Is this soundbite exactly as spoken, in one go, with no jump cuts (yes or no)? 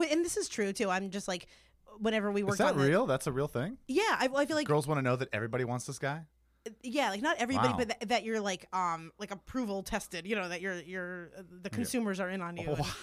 yes